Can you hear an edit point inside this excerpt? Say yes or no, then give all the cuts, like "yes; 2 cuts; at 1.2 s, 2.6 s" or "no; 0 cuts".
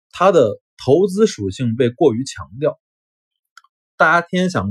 no; 0 cuts